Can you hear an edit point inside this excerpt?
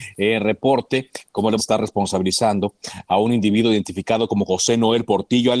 yes; 1 cut; at 1.6 s

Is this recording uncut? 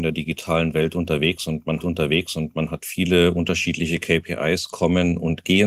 no; 1 cut; at 1.8 s

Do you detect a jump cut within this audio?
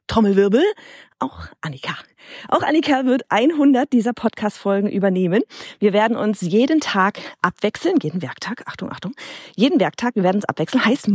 no; 0 cuts

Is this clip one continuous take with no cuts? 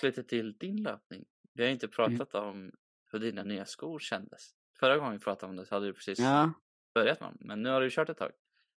yes; 0 cuts

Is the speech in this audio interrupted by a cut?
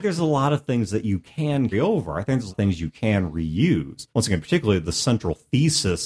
yes; 3 cuts; at 1.7 s, 2.5 s, 4.1 s

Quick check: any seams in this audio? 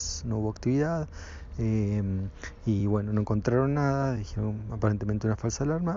no; 0 cuts

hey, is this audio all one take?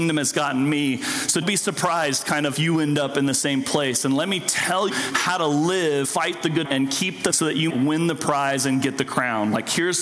no; 7 cuts; at 1.4 s, 2.5 s, 4.9 s, 6.0 s, 6.6 s, 7.3 s, 7.7 s

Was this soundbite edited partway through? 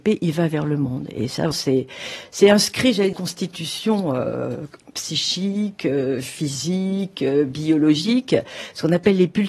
yes; 2 cuts; at 1.5 s, 3.1 s

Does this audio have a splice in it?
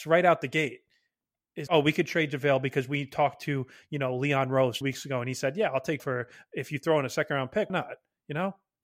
yes; 4 cuts; at 1.7 s, 4.8 s, 6.0 s, 7.7 s

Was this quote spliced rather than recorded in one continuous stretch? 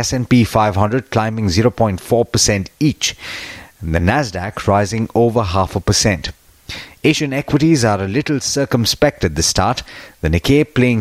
no; 0 cuts

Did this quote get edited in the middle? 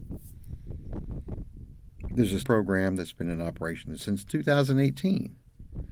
yes; 2 cuts; at 2.4 s, 4.0 s

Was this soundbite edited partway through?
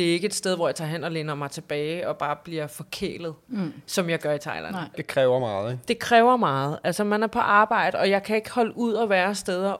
no; 0 cuts

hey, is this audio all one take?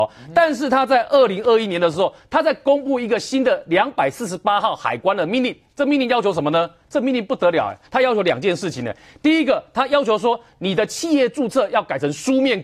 yes; 0 cuts

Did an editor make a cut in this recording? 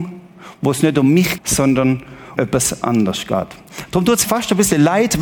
yes; 3 cuts; at 1.4 s, 2.4 s, 4.2 s

